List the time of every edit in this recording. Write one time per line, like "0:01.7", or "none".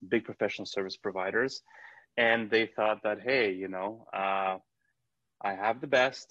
none